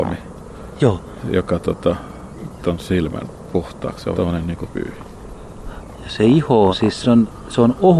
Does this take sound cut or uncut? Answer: cut